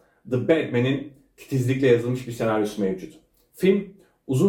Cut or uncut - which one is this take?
uncut